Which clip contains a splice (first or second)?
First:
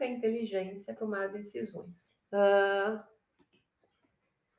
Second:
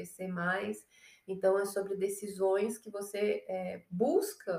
first